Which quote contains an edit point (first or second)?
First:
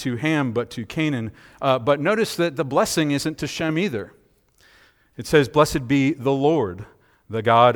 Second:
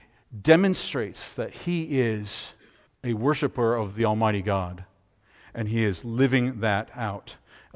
second